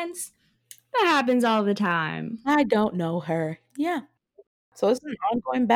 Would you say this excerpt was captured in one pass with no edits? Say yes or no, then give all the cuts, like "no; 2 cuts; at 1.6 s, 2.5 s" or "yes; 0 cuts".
yes; 0 cuts